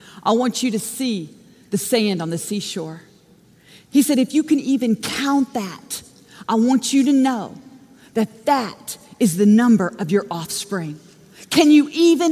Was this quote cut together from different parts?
no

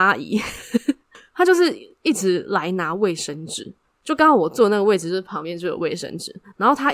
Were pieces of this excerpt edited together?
no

